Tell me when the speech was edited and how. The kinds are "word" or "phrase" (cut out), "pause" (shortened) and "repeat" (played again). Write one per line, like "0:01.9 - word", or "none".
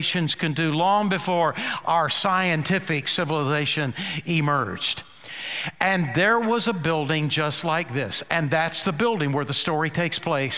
none